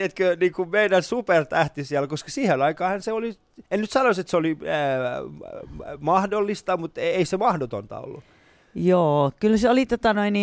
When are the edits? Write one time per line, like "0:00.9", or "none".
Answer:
0:03.6